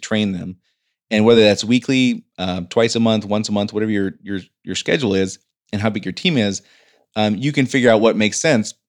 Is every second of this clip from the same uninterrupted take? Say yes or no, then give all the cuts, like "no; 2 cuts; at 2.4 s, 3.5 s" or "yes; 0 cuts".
yes; 0 cuts